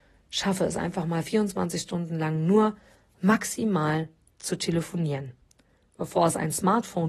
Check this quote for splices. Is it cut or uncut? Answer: uncut